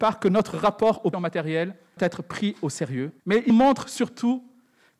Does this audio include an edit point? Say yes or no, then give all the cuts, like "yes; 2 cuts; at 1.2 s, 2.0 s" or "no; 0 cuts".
yes; 4 cuts; at 1.1 s, 2.0 s, 3.2 s, 3.5 s